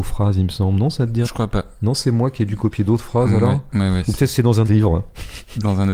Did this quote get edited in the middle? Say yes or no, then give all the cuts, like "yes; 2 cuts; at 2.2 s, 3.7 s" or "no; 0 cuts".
yes; 2 cuts; at 1.2 s, 4.6 s